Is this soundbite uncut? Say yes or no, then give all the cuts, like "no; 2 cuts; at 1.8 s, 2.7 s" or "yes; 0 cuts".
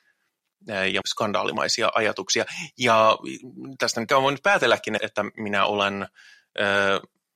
no; 3 cuts; at 1.0 s, 4.1 s, 5.0 s